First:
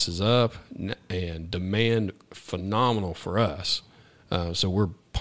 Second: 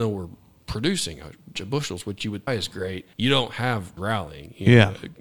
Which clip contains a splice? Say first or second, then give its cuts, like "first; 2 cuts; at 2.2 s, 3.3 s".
second; 4 cuts; at 1.6 s, 2.5 s, 3.1 s, 4.0 s